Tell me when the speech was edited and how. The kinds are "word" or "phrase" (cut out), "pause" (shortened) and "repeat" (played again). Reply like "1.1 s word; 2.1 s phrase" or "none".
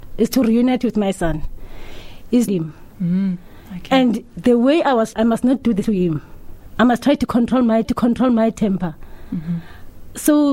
2.5 s phrase; 5.1 s word; 5.8 s phrase; 7.8 s repeat